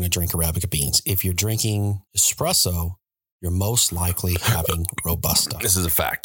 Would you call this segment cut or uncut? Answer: cut